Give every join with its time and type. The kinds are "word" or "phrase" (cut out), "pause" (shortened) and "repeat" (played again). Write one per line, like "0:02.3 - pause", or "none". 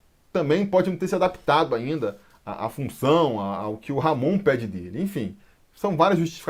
none